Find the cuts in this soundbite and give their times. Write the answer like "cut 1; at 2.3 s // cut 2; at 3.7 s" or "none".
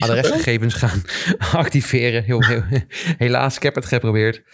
none